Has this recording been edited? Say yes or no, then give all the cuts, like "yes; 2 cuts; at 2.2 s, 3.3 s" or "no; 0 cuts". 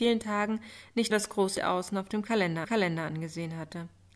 yes; 3 cuts; at 1.1 s, 1.6 s, 2.6 s